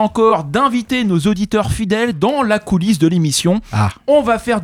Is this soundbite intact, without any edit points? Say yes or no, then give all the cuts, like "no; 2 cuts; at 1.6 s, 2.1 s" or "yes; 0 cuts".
yes; 0 cuts